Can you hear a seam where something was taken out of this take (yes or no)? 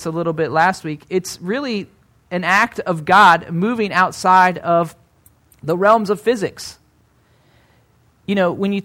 no